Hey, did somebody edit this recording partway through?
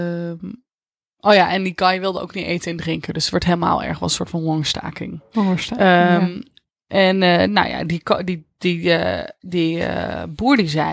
no; 0 cuts

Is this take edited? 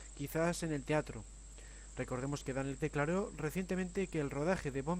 yes; 1 cut; at 2.8 s

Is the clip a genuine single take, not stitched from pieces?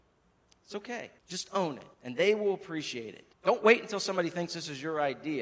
no; 3 cuts; at 1.2 s, 1.9 s, 3.3 s

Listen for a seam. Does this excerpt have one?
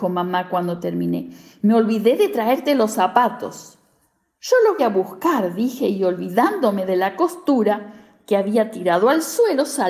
yes; 1 cut; at 4.8 s

